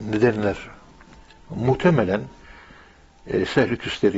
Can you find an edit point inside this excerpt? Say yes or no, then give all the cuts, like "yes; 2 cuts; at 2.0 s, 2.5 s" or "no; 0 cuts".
no; 0 cuts